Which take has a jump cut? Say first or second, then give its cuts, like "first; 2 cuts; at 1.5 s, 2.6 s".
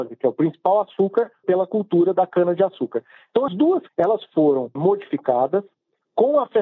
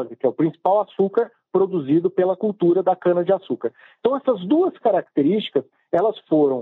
first; 4 cuts; at 1.4 s, 3.5 s, 3.9 s, 4.8 s